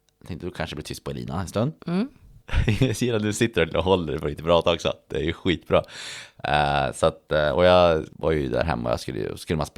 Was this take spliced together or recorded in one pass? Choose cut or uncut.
uncut